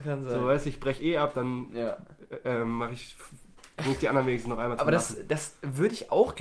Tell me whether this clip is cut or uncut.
uncut